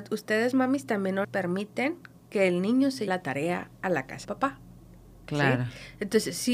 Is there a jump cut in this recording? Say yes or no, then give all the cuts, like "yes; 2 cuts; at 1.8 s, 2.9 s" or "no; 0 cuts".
yes; 3 cuts; at 1.2 s, 3.1 s, 4.2 s